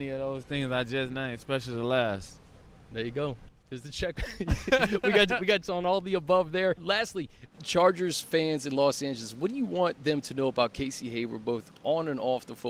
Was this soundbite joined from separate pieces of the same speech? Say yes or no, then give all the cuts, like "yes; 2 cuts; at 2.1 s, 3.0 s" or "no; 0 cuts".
yes; 1 cut; at 5.6 s